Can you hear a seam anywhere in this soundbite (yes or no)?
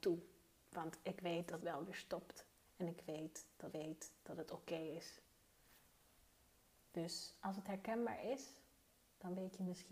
yes